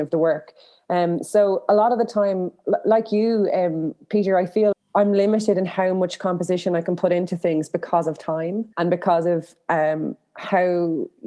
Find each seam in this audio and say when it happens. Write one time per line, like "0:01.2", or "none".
0:04.7
0:08.7